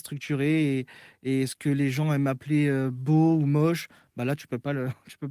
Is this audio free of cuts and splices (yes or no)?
yes